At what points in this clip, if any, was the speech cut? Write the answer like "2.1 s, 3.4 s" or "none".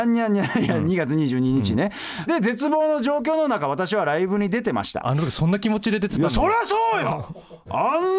2.3 s